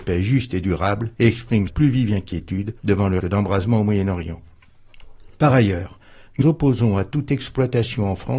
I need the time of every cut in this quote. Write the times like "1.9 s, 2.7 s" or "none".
1.1 s, 1.7 s, 2.8 s, 3.2 s, 5.3 s, 6.4 s